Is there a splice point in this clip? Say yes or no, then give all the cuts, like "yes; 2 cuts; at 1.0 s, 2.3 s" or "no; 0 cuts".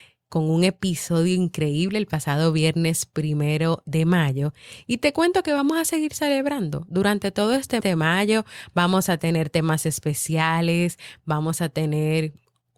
yes; 1 cut; at 7.8 s